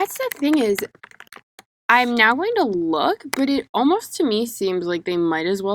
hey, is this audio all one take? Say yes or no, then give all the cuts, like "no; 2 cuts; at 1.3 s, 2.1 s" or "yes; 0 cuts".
yes; 0 cuts